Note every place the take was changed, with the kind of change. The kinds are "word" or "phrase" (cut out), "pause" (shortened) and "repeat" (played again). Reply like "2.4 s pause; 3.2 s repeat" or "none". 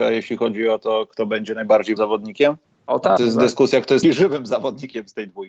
2.0 s word; 2.6 s pause; 3.2 s word; 4.0 s word